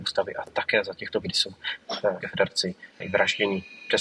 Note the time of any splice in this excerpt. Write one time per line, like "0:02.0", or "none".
0:01.2
0:02.2
0:03.0